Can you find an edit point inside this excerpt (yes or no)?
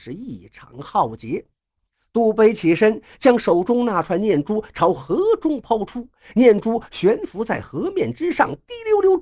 no